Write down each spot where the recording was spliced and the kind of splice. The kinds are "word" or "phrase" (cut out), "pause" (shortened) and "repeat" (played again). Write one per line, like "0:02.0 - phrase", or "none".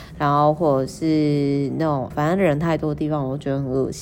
0:02.1 - word